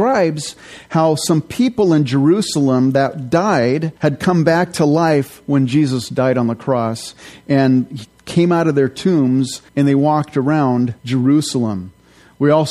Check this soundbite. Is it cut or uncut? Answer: cut